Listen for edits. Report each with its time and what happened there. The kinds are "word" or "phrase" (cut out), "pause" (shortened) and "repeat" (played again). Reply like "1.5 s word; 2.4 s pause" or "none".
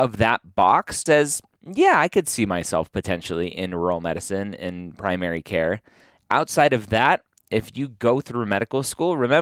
1.1 s word